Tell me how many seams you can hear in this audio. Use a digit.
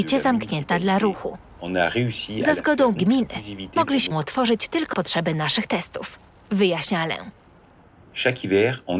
3